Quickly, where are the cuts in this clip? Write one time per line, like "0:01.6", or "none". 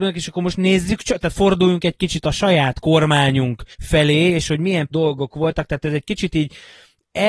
0:03.7
0:04.9